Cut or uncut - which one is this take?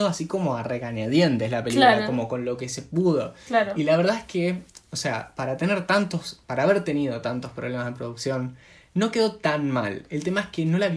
uncut